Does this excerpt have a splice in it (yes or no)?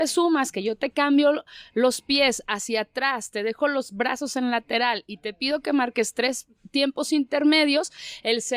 no